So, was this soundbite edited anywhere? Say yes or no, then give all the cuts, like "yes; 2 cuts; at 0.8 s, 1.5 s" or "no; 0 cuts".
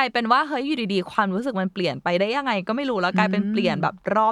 no; 0 cuts